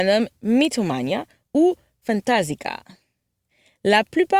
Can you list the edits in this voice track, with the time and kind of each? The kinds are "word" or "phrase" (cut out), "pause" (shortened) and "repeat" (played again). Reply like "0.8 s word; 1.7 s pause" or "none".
2.0 s word